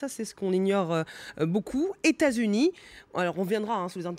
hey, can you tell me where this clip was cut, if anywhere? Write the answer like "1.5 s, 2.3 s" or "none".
none